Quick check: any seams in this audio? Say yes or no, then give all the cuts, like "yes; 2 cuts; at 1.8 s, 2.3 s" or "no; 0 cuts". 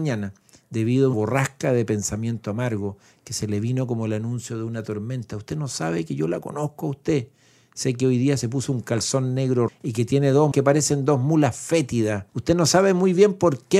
yes; 4 cuts; at 1.1 s, 9.7 s, 10.5 s, 12.3 s